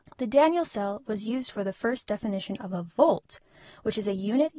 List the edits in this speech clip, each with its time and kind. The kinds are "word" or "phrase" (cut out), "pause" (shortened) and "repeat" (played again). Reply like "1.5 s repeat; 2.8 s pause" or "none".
none